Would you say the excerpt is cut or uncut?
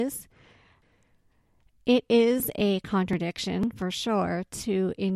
uncut